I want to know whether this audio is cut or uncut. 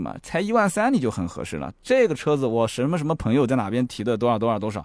uncut